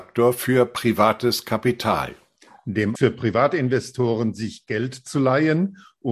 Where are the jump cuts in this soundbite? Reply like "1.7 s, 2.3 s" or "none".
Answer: 2.9 s